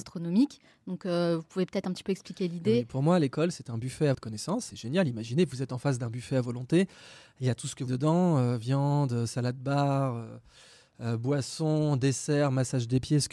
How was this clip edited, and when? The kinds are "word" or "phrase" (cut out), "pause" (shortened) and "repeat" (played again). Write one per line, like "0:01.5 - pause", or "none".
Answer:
0:04.1 - word
0:04.7 - word
0:07.9 - word